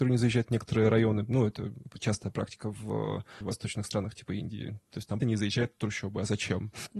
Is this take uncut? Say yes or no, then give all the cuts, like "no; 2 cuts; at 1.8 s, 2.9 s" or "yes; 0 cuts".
no; 2 cuts; at 3.4 s, 5.2 s